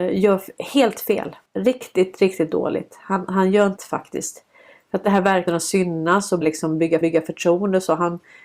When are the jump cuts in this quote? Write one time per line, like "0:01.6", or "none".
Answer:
0:01.5
0:03.8
0:05.5
0:06.4
0:07.0